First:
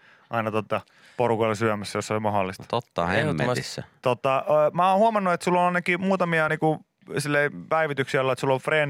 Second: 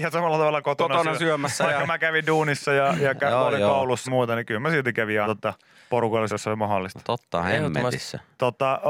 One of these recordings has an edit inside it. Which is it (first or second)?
second